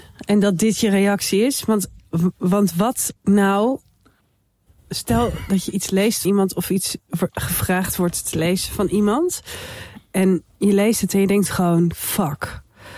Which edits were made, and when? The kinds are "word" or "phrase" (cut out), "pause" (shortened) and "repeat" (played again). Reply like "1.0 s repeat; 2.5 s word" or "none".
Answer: 3.2 s pause; 6.2 s word